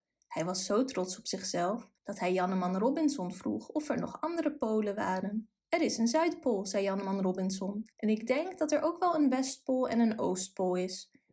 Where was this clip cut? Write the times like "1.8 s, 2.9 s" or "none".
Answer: 2.0 s, 5.6 s, 7.9 s